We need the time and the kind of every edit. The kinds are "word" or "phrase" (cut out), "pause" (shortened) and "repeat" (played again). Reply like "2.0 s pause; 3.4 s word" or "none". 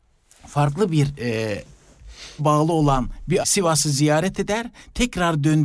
2.4 s word; 3.4 s word